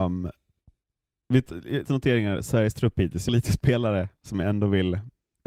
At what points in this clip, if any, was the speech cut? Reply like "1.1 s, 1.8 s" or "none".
1.8 s, 3.3 s